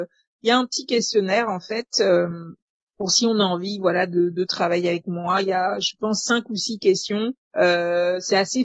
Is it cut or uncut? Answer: uncut